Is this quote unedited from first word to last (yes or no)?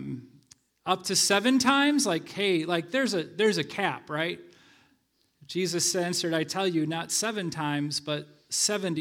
yes